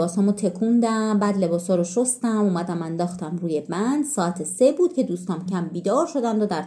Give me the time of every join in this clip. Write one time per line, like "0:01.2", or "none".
0:05.5